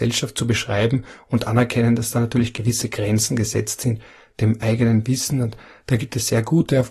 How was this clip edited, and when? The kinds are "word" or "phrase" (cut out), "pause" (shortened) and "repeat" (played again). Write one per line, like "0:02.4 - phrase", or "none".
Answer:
none